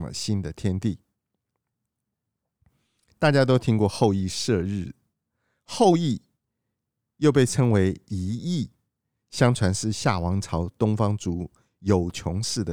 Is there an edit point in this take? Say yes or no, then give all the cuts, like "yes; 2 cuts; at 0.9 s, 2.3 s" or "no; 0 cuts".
no; 0 cuts